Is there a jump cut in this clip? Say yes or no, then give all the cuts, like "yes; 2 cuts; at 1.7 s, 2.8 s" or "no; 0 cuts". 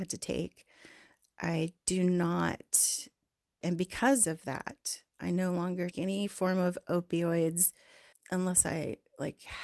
yes; 3 cuts; at 3.6 s, 5.9 s, 8.1 s